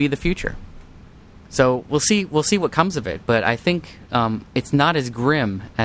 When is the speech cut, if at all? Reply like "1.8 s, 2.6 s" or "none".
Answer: 1.2 s